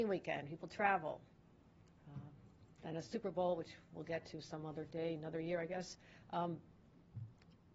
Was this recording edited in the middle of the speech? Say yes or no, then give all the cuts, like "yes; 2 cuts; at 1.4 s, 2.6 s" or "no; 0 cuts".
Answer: yes; 1 cut; at 2.7 s